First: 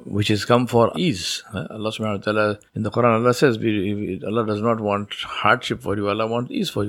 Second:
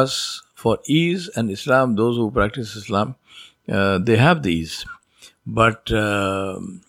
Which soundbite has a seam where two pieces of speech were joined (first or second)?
first